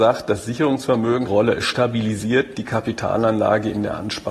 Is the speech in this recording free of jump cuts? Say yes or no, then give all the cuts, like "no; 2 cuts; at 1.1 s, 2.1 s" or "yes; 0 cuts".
no; 2 cuts; at 1.3 s, 2.5 s